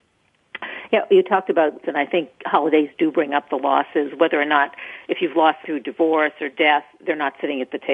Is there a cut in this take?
yes; 2 cuts; at 1.8 s, 5.6 s

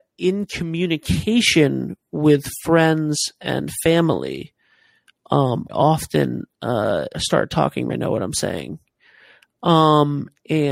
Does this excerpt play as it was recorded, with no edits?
no; 3 cuts; at 5.7 s, 7.1 s, 7.9 s

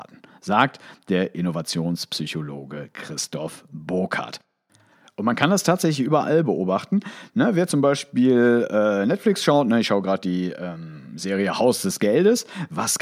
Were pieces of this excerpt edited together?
no; 0 cuts

